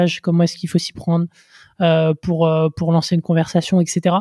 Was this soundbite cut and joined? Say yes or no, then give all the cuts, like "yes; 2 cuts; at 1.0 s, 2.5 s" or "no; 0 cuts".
no; 0 cuts